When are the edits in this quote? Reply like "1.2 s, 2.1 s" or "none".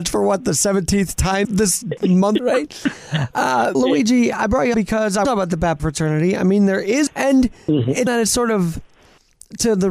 1.4 s, 2.4 s, 3.7 s, 4.7 s, 5.2 s, 5.8 s, 7.1 s, 8.1 s